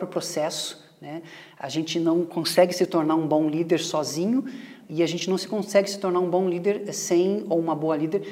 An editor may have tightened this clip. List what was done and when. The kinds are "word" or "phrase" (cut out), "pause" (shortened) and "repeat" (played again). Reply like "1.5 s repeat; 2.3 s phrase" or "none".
none